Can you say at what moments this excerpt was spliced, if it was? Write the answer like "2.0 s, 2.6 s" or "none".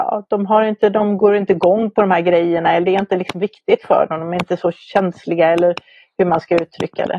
none

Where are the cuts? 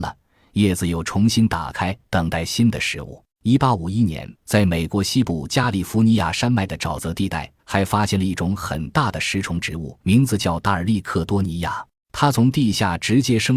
2.0 s, 3.3 s, 4.4 s, 7.6 s, 10.0 s, 11.9 s

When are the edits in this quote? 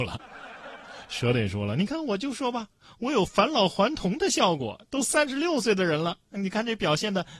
none

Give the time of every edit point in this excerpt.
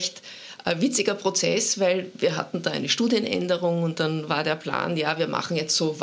none

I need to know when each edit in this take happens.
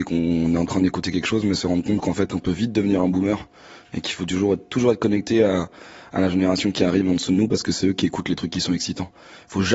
none

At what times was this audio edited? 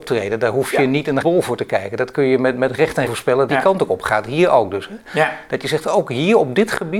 1.2 s, 3.1 s, 3.5 s

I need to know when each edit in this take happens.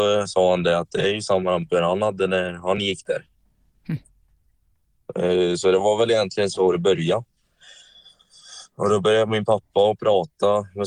none

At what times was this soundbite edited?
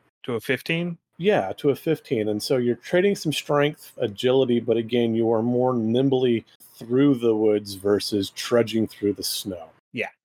4.0 s, 6.6 s

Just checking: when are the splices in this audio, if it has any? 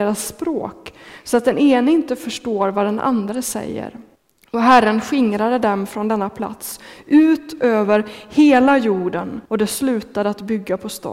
4.1 s, 9.5 s

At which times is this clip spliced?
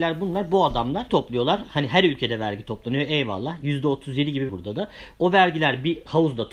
1.1 s, 4.5 s

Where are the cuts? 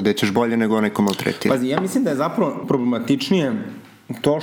2.6 s

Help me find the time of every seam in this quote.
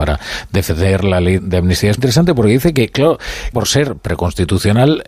1.4 s, 2.0 s, 3.5 s

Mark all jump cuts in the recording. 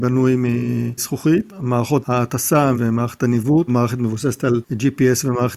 1.0 s, 2.7 s, 3.7 s

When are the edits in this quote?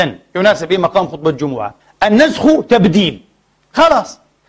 1.8 s

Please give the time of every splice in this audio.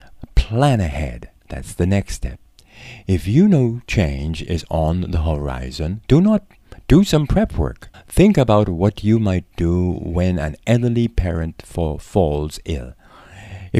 1.4 s, 7.9 s

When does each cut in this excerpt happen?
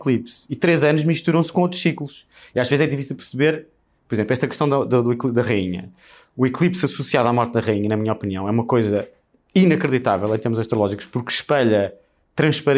none

